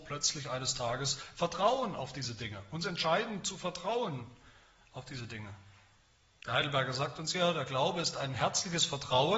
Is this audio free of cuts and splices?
yes; 0 cuts

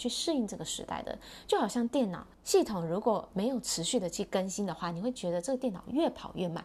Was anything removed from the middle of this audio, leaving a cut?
yes; 1 cut; at 2.3 s

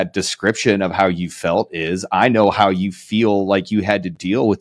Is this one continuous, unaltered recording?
yes; 0 cuts

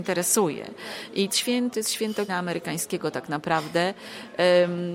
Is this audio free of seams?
no; 3 cuts; at 1.3 s, 1.7 s, 2.3 s

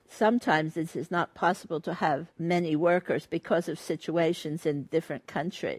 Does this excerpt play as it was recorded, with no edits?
no; 1 cut; at 2.3 s

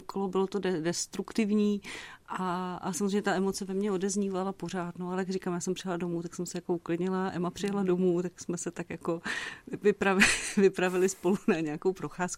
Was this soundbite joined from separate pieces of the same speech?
no; 0 cuts

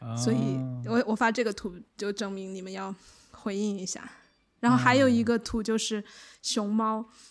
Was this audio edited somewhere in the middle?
no; 0 cuts

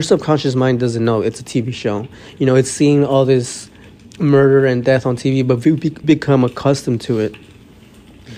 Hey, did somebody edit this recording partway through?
yes; 1 cut; at 6.0 s

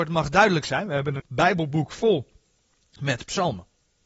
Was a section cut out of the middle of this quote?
yes; 1 cut; at 1.2 s

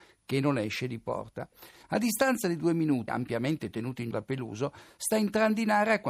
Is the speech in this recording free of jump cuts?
no; 2 cuts; at 3.1 s, 4.1 s

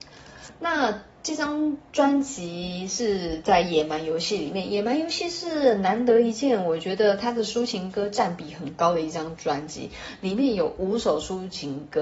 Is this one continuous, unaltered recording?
yes; 0 cuts

